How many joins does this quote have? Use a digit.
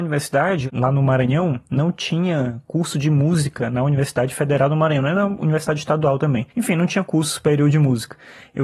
1